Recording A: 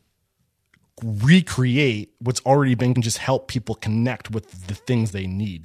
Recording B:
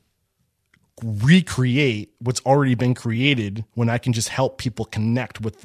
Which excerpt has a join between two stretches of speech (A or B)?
A